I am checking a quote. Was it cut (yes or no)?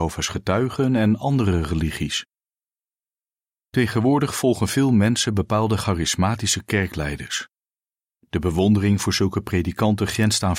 no